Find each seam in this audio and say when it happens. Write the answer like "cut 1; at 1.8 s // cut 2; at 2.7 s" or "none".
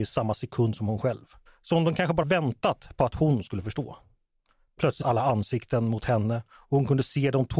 cut 1; at 1.5 s // cut 2; at 2.2 s // cut 3; at 5.0 s